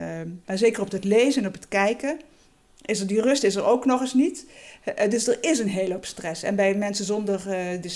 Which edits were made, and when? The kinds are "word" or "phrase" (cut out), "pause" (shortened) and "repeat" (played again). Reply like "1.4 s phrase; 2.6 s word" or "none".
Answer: none

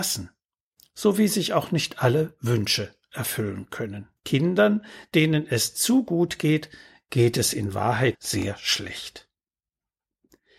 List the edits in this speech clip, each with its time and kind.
4.2 s pause; 8.1 s word

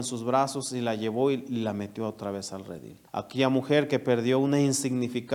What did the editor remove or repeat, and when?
3.1 s pause

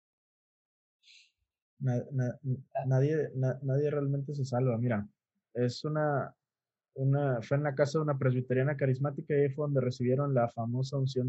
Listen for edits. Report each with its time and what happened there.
none

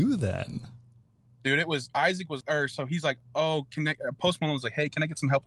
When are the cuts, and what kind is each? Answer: 1.9 s word; 2.4 s word

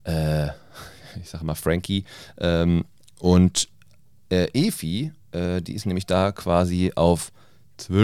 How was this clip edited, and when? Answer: none

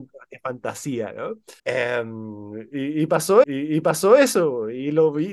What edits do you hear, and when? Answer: 1.6 s pause; 3.4 s repeat

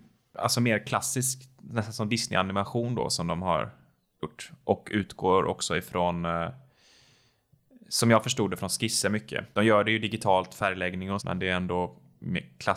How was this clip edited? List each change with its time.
11.2 s word

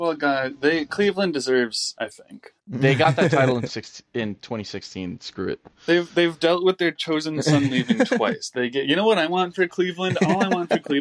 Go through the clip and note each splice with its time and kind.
1.9 s word; 2.6 s pause; 3.7 s word

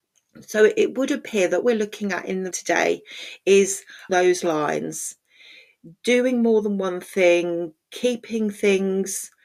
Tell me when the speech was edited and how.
1.6 s word; 2.5 s word; 4.1 s word

